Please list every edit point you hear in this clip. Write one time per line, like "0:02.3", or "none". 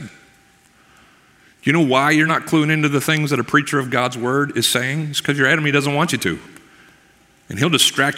none